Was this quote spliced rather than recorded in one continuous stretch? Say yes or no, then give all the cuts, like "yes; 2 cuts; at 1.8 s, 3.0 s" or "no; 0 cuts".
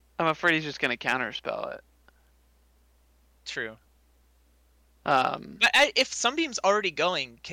no; 0 cuts